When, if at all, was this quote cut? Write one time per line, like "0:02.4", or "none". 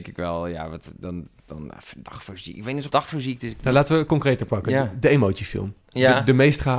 0:02.9
0:05.8